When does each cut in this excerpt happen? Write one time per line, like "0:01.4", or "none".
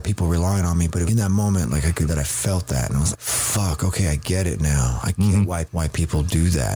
0:01.1
0:02.1
0:03.1
0:05.6